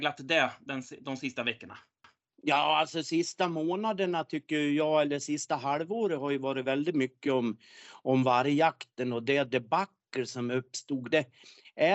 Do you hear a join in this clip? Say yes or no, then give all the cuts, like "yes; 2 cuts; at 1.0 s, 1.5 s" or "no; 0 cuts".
no; 0 cuts